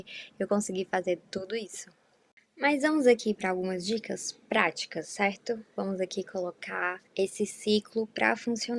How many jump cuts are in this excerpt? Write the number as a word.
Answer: one